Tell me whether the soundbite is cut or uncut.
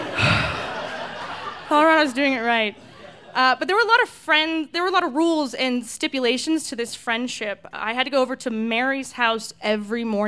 uncut